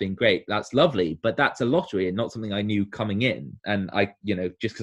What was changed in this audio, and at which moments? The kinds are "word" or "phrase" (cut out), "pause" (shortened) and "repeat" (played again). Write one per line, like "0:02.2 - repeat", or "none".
0:03.6 - pause